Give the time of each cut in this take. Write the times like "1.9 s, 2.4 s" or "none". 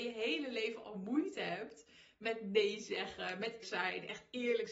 3.6 s

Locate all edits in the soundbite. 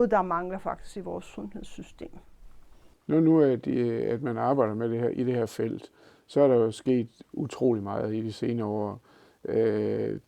none

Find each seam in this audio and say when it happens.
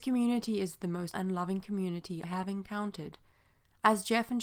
1.1 s, 2.2 s

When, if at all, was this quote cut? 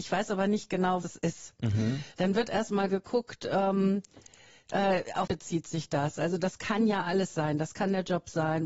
1.0 s, 5.3 s

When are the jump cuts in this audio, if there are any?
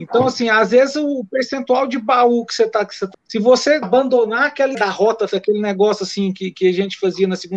3.1 s, 3.8 s, 4.7 s, 5.3 s

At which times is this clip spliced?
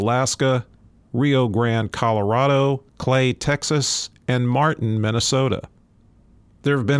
2.9 s

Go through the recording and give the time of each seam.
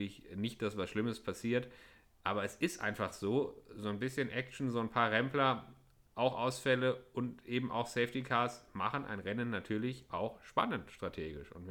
none

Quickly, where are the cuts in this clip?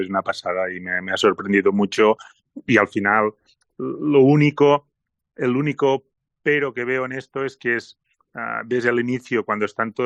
none

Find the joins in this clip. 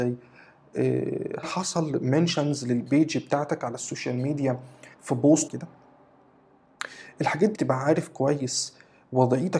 1.4 s, 4.9 s, 5.5 s, 7.5 s

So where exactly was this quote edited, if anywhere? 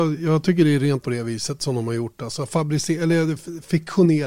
1.0 s

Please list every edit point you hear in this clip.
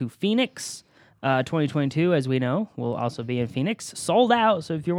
none

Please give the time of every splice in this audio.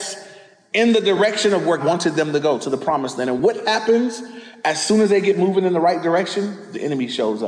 1.8 s

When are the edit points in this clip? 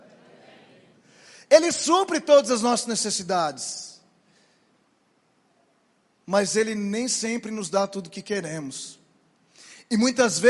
none

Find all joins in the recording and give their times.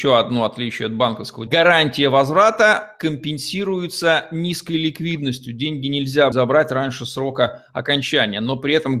1.5 s, 6.3 s

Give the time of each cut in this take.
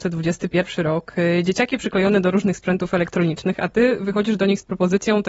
none

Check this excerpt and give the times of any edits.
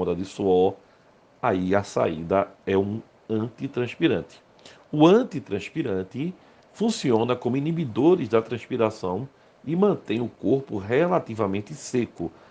none

